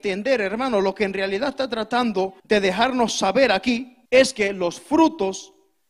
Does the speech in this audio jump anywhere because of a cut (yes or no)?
yes